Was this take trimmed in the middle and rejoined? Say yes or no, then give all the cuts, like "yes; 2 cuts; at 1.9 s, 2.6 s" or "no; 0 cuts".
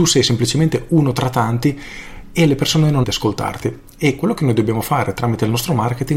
yes; 1 cut; at 3.0 s